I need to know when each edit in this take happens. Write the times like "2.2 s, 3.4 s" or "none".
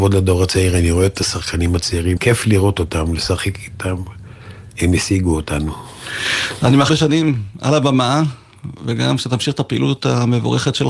2.2 s, 6.9 s